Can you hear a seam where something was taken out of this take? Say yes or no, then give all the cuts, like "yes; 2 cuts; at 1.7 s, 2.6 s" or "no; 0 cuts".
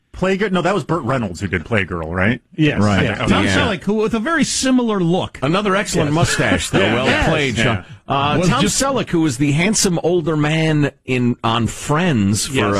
no; 0 cuts